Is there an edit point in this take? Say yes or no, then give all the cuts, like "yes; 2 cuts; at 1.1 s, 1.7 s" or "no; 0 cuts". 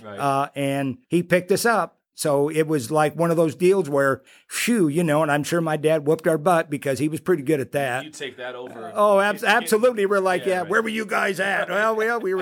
yes; 2 cuts; at 1.0 s, 4.3 s